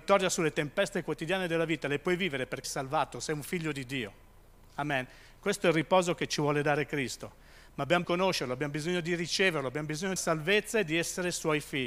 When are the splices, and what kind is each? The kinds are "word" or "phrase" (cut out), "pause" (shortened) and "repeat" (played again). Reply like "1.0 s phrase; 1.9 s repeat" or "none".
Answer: 2.6 s word; 8.0 s phrase; 10.2 s phrase

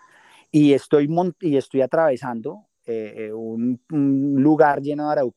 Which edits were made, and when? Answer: none

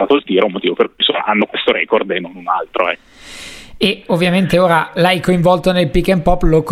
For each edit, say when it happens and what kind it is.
none

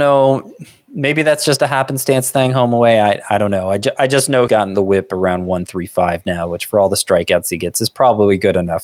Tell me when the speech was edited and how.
4.5 s word

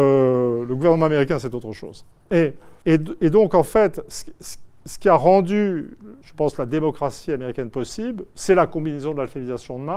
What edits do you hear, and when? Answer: 2.8 s pause; 6.2 s pause

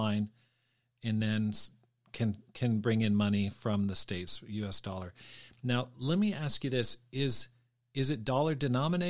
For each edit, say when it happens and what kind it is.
none

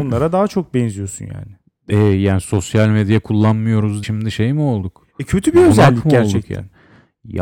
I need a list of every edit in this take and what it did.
4.0 s word

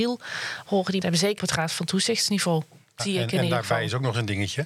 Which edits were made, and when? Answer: 1.0 s word; 1.4 s word; 3.0 s word

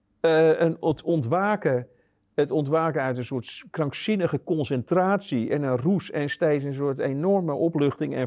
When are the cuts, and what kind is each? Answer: none

